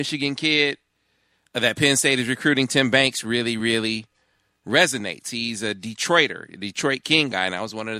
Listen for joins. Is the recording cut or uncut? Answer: uncut